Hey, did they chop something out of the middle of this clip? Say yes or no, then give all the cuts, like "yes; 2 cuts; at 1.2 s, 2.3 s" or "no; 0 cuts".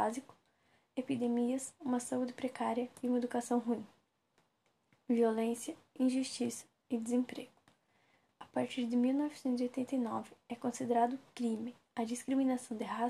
no; 0 cuts